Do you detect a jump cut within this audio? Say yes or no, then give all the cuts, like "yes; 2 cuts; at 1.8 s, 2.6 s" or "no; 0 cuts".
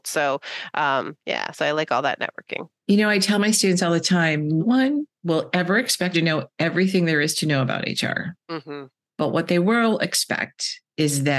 yes; 4 cuts; at 2.8 s, 4.6 s, 6.1 s, 8.4 s